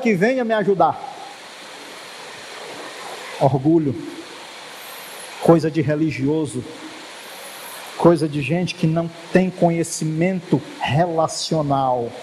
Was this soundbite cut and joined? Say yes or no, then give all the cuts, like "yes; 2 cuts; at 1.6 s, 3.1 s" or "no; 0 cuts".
no; 0 cuts